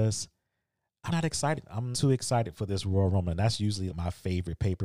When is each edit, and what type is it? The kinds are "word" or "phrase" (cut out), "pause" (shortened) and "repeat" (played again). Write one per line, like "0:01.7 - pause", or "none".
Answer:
0:01.1 - word
0:01.9 - word
0:03.9 - word